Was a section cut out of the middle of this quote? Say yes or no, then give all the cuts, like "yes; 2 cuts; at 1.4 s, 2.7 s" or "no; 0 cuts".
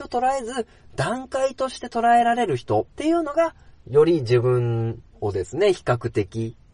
yes; 1 cut; at 2.9 s